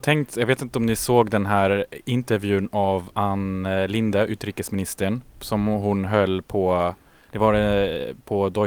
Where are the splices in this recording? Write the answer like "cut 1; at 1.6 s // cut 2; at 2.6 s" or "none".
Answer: none